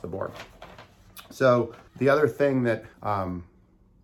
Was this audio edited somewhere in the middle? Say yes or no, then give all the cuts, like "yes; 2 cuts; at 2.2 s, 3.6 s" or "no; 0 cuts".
yes; 2 cuts; at 1.9 s, 2.9 s